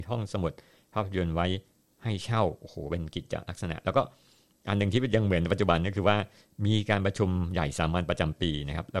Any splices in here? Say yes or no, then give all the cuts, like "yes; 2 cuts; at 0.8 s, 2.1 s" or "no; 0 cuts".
no; 0 cuts